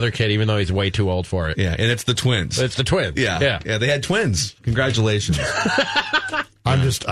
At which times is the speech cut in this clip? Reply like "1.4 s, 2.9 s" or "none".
none